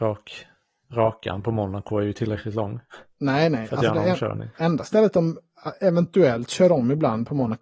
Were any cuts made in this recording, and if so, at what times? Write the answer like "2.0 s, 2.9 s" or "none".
4.5 s